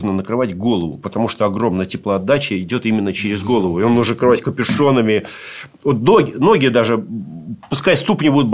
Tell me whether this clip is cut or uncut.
uncut